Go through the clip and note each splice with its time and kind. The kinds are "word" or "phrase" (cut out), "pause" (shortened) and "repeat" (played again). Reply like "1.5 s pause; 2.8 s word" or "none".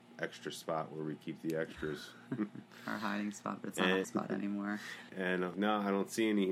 4.0 s word; 5.1 s word; 5.5 s word